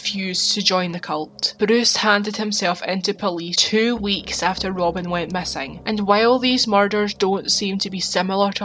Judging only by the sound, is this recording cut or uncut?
cut